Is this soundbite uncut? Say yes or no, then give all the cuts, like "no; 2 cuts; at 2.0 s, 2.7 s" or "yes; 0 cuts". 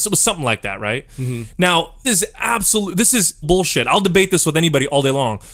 no; 2 cuts; at 2.0 s, 3.4 s